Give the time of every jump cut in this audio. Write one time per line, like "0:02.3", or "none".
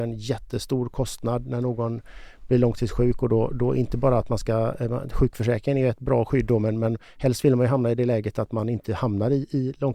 none